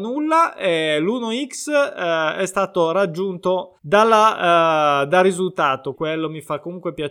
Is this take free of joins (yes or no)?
no